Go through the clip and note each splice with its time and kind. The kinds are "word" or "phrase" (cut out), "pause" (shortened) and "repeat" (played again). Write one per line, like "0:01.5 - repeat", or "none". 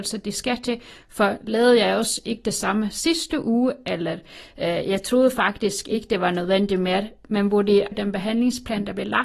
0:07.9 - phrase